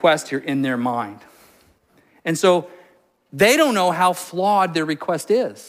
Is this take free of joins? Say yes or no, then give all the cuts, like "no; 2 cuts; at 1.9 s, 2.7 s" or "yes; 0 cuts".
yes; 0 cuts